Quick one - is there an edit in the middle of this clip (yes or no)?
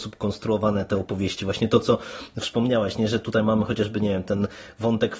no